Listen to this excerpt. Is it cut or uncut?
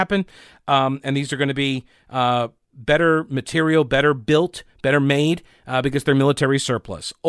uncut